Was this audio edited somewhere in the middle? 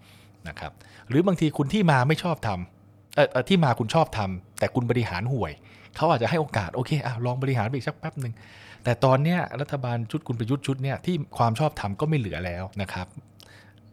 yes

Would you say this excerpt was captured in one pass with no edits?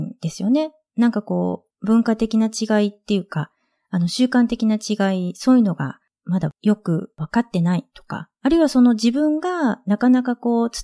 yes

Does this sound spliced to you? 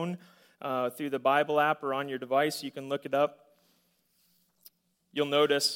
no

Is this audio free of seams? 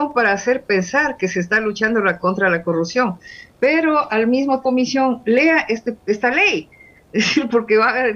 no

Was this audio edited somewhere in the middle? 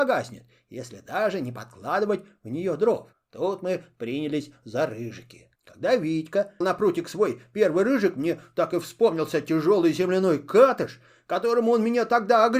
yes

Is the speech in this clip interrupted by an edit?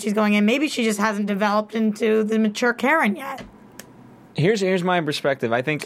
no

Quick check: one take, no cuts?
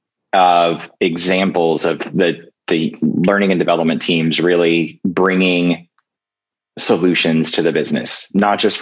yes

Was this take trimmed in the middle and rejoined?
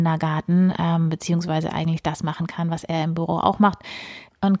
no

